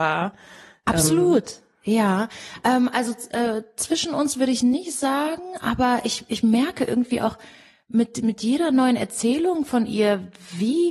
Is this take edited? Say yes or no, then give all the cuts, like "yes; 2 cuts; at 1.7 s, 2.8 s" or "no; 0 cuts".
no; 0 cuts